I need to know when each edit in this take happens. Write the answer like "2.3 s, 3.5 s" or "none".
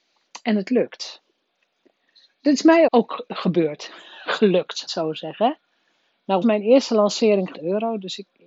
1.5 s, 2.9 s, 4.9 s, 6.4 s, 7.5 s